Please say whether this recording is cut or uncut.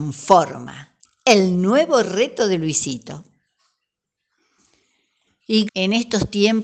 cut